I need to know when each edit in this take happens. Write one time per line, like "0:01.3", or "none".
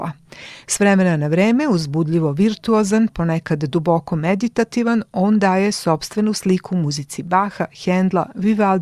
none